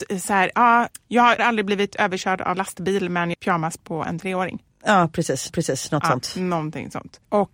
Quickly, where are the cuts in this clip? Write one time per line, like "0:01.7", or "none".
0:01.4
0:02.5
0:03.3
0:05.5